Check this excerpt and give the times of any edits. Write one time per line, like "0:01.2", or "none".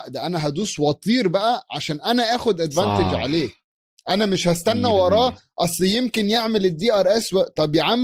none